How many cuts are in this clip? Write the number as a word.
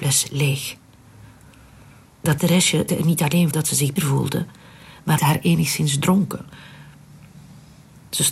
five